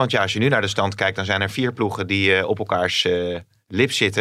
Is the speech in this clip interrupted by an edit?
no; 0 cuts

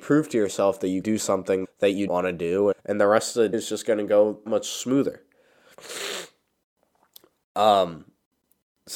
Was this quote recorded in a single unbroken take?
no; 6 cuts; at 1.0 s, 1.6 s, 2.1 s, 2.7 s, 3.5 s, 4.5 s

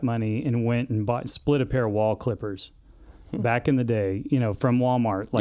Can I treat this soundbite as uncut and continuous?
yes; 0 cuts

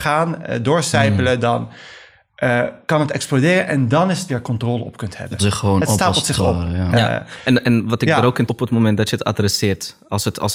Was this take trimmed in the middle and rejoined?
yes; 3 cuts; at 4.3 s, 5.4 s, 8.5 s

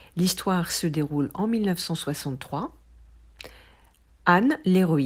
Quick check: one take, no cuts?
yes; 0 cuts

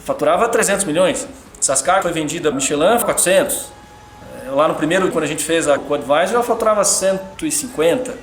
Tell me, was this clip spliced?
yes; 5 cuts; at 2.0 s, 2.5 s, 3.0 s, 5.1 s, 5.8 s

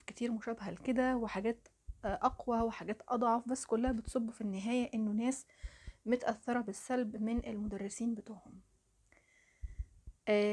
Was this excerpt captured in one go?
yes; 0 cuts

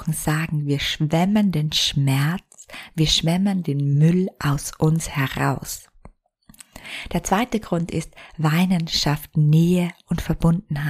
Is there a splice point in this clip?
no; 0 cuts

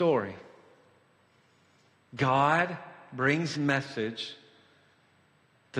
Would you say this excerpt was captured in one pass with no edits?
no; 1 cut; at 3.5 s

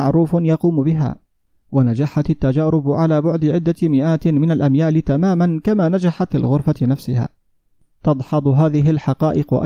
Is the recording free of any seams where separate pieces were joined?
no; 1 cut; at 6.3 s

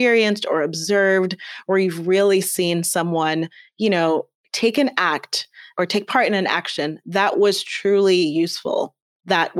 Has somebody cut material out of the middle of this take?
no; 0 cuts

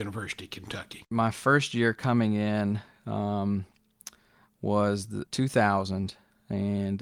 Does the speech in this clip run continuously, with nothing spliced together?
no; 1 cut; at 5.3 s

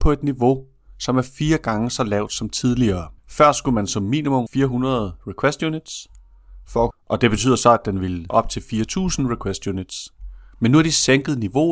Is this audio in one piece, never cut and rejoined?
no; 4 cuts; at 3.2 s, 4.5 s, 6.9 s, 8.3 s

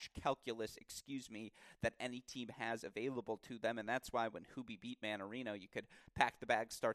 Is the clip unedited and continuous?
yes; 0 cuts

